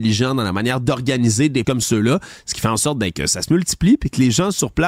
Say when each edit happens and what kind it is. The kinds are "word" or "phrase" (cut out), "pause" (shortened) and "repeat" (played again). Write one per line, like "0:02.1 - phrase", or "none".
0:01.6 - word